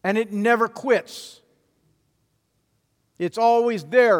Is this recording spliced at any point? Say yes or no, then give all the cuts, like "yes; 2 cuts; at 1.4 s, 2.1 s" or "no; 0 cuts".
no; 0 cuts